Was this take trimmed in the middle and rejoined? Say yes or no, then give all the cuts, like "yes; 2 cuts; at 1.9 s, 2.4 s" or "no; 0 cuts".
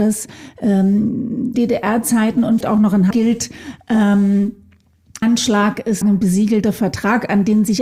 yes; 5 cuts; at 1.5 s, 2.6 s, 3.1 s, 5.2 s, 6.0 s